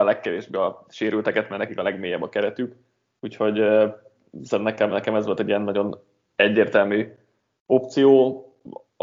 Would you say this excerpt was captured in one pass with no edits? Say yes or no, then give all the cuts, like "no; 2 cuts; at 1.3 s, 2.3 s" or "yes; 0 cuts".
yes; 0 cuts